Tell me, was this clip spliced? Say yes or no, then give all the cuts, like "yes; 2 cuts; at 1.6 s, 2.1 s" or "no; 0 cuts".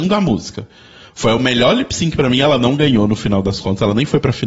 no; 0 cuts